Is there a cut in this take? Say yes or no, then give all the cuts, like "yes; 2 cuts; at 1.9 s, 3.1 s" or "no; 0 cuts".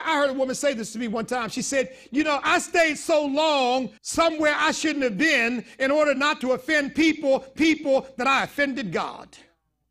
yes; 2 cuts; at 4.0 s, 7.6 s